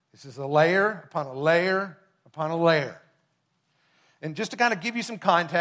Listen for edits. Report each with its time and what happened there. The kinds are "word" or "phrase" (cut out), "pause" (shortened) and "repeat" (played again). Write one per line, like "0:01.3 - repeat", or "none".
none